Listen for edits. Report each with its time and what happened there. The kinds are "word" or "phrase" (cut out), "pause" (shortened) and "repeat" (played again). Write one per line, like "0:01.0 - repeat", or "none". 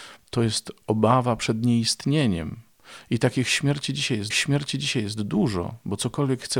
0:04.3 - repeat